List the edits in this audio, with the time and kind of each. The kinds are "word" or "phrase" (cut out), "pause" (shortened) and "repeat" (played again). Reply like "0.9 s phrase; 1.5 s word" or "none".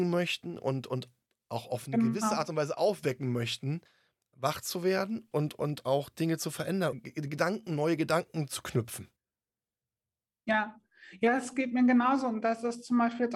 5.3 s word; 6.9 s word